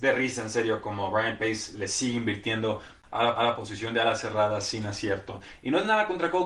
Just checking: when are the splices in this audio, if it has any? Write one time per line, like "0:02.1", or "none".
0:03.4